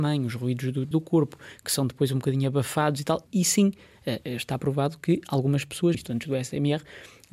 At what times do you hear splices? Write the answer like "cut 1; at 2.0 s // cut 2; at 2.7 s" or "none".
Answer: cut 1; at 0.9 s // cut 2; at 3.3 s // cut 3; at 5.9 s